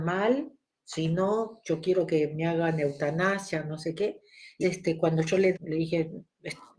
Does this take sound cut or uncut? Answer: cut